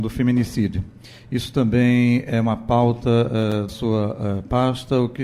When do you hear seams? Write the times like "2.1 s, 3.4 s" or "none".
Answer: 3.7 s